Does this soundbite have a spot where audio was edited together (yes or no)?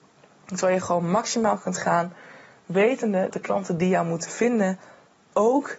yes